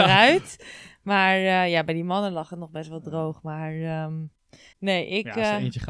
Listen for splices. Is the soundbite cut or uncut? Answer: cut